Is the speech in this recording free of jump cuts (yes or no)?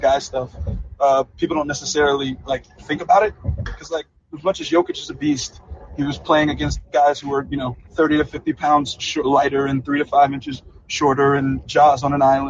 no